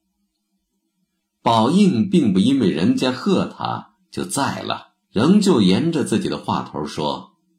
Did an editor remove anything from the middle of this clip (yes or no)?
yes